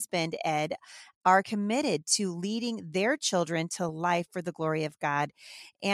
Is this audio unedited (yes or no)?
yes